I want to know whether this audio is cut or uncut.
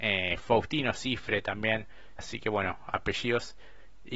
cut